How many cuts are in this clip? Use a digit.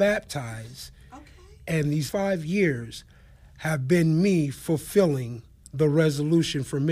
1